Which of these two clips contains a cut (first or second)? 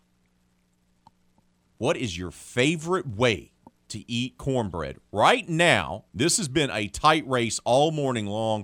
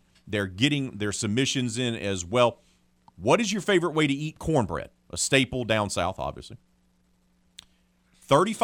first